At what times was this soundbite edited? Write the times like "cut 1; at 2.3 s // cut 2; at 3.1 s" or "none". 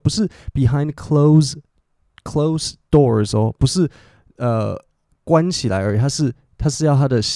none